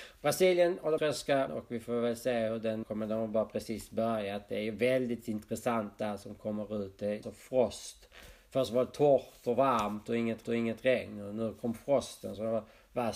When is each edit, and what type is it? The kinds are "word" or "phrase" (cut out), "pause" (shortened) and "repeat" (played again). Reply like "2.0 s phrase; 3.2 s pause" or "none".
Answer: 1.0 s word; 1.5 s word; 2.8 s word; 7.2 s phrase; 10.4 s repeat

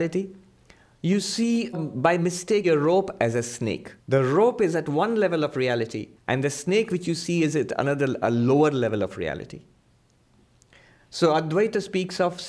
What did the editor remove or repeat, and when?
1.7 s word; 2.6 s phrase; 4.0 s pause; 6.2 s pause

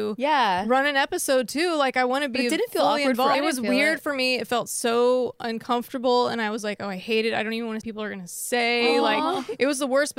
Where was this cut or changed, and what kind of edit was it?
3.3 s phrase; 7.8 s phrase

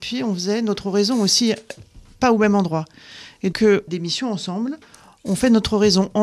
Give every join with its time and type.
3.5 s word; 3.9 s phrase

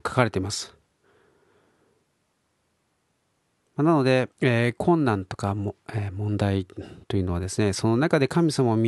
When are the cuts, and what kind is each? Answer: 4.3 s pause; 7.0 s pause

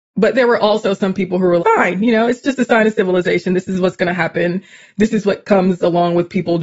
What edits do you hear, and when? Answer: 1.6 s phrase

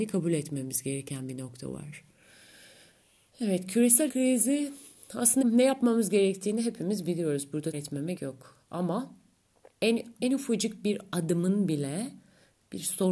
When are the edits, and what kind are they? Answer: 4.1 s word; 5.4 s word; 7.7 s word; 8.1 s word; 9.7 s word; 10.2 s word

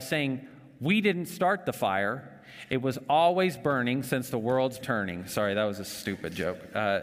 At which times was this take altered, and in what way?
4.8 s word

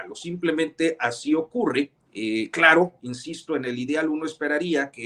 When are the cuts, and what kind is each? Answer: 2.1 s pause

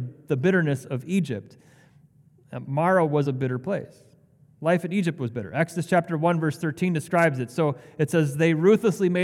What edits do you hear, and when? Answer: none

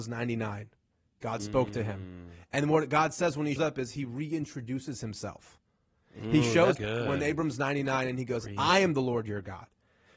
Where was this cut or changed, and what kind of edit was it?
3.6 s word; 6.7 s word

